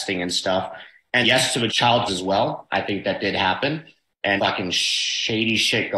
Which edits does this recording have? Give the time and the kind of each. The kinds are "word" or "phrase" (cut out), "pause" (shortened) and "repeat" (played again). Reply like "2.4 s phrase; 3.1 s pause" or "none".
1.2 s word; 1.7 s phrase; 2.1 s word; 4.4 s phrase